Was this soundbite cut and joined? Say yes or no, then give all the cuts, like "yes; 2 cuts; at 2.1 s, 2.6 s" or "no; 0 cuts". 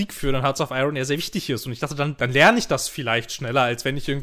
yes; 1 cut; at 2.2 s